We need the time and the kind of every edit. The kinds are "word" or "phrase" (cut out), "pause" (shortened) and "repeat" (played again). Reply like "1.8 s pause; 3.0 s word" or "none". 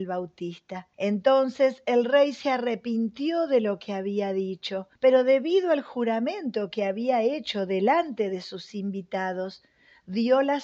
0.9 s pause; 5.0 s pause